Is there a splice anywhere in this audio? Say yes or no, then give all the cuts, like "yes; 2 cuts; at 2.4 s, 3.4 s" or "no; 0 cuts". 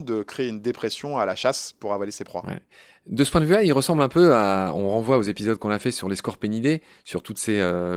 no; 0 cuts